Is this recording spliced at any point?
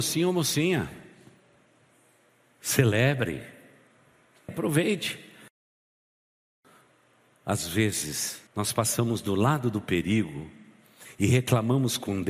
yes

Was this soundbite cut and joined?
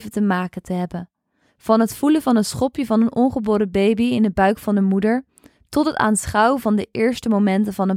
no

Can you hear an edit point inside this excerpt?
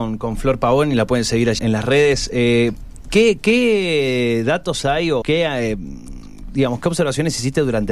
yes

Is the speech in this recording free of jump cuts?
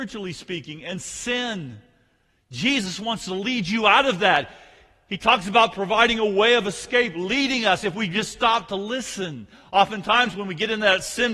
yes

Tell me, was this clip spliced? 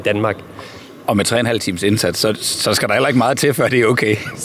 no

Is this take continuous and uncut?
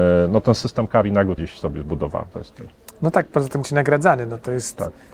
no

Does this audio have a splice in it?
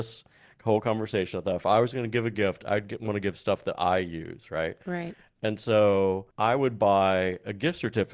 yes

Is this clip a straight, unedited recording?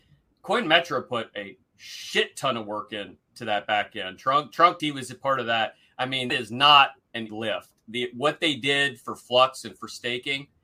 no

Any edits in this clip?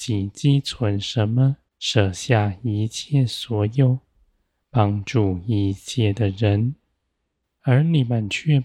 yes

